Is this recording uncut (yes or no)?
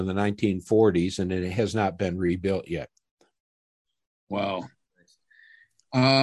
yes